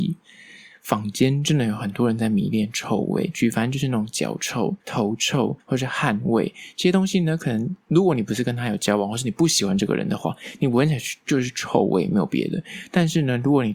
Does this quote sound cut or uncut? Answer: cut